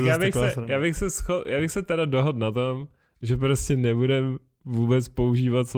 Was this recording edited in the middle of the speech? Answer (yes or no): no